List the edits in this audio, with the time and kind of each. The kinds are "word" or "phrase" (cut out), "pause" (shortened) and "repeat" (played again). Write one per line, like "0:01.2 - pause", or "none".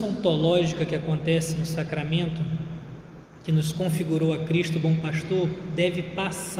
none